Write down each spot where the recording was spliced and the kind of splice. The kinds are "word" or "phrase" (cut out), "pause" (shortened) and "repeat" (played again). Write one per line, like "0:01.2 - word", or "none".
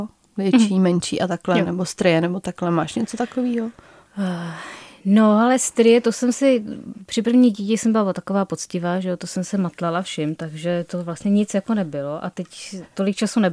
none